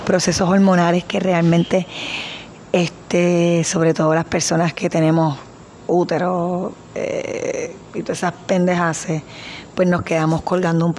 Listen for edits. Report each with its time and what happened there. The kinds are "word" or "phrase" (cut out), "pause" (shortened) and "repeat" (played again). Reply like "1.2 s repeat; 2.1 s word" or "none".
none